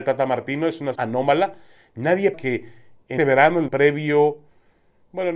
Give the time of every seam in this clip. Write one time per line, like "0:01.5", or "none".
0:00.9
0:02.3
0:03.2
0:03.7